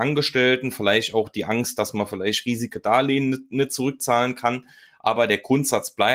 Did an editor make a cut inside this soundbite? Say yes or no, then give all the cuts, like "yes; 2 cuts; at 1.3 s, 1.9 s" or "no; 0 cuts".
no; 0 cuts